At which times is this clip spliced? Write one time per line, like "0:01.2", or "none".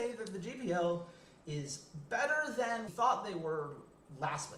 0:02.9